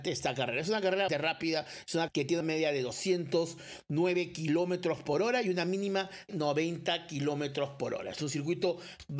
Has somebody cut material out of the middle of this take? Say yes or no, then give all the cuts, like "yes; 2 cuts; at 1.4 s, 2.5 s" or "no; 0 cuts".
yes; 4 cuts; at 1.1 s, 2.1 s, 2.4 s, 6.3 s